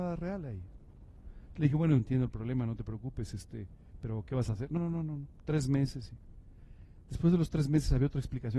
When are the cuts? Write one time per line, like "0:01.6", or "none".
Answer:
0:02.0
0:04.8